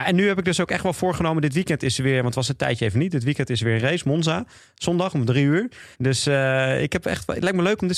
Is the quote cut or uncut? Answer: cut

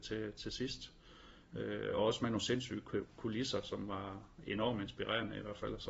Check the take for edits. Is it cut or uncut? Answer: uncut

